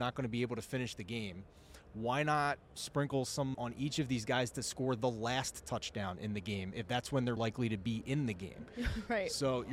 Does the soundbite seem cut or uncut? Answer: cut